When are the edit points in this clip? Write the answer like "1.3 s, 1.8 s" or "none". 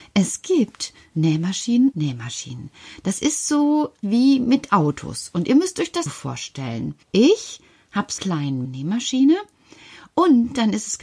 1.9 s, 4.0 s, 6.1 s, 7.0 s, 8.2 s, 8.6 s